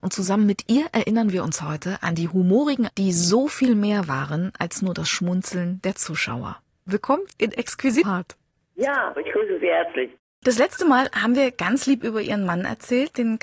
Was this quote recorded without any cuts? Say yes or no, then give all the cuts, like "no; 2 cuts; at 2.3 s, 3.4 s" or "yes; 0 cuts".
no; 4 cuts; at 2.9 s, 7.3 s, 8.0 s, 9.2 s